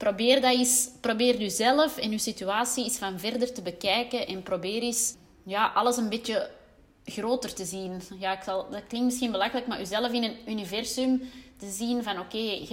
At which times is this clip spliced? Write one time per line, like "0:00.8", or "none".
none